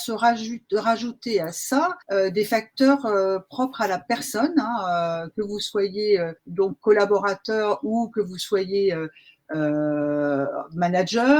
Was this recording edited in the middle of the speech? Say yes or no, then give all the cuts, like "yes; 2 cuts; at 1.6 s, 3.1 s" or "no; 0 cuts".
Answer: yes; 2 cuts; at 2.0 s, 6.4 s